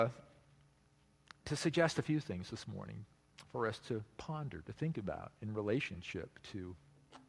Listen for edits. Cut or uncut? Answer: uncut